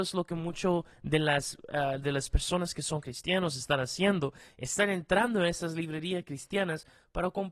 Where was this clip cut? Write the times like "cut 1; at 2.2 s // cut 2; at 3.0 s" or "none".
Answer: none